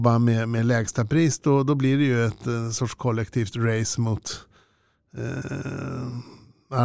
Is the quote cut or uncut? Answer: uncut